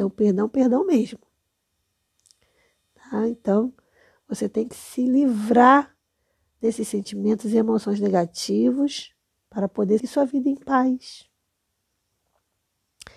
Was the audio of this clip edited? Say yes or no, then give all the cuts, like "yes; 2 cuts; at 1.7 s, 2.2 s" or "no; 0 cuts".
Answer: yes; 1 cut; at 10.0 s